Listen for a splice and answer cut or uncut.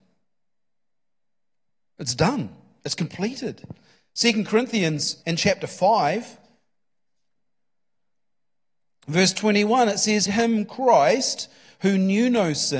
cut